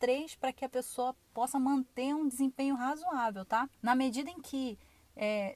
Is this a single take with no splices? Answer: no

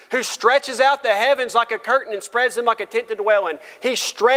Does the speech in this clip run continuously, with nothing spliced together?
yes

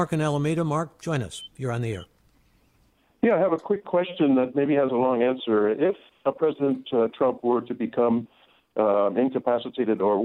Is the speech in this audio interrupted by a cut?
no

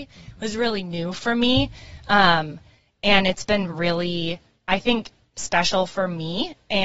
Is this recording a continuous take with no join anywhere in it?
yes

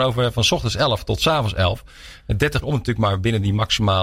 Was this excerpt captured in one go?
no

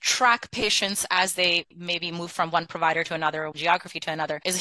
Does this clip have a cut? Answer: yes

